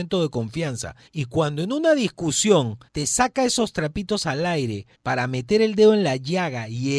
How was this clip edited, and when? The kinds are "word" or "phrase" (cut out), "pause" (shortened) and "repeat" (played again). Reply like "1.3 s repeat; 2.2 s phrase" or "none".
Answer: 1.1 s pause; 2.9 s pause; 4.9 s pause